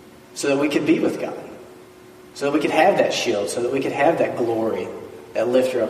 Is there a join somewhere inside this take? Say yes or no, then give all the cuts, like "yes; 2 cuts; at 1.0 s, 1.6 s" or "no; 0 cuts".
yes; 1 cut; at 1.9 s